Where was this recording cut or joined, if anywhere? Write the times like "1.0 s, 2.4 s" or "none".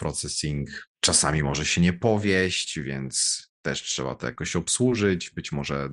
0.9 s